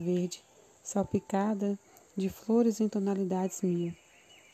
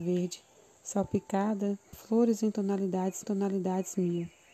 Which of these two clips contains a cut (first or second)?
second